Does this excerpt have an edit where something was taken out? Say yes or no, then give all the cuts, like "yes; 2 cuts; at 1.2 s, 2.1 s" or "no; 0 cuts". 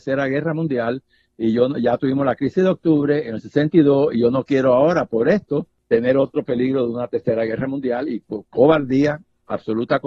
no; 0 cuts